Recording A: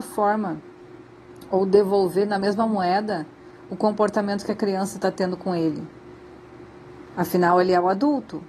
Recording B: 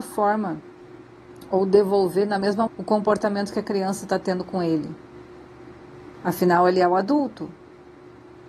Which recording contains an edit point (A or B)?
B